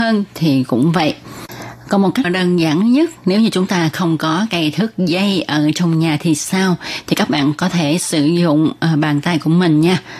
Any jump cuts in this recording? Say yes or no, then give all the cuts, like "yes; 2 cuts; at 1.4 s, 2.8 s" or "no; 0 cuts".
yes; 1 cut; at 2.2 s